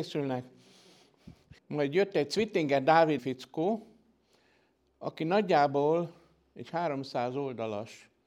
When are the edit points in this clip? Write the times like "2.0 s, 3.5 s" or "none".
1.6 s, 3.2 s